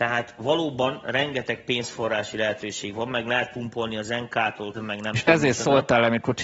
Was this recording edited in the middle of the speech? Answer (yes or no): yes